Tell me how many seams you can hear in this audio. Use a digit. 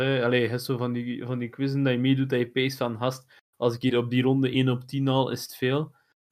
0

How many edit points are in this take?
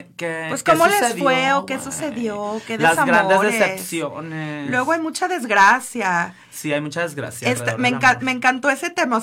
0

